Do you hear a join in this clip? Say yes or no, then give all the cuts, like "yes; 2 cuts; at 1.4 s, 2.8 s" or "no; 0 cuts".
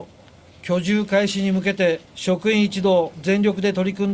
yes; 2 cuts; at 2.0 s, 3.1 s